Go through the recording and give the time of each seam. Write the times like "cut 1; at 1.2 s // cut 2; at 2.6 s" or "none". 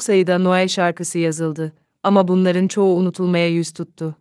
none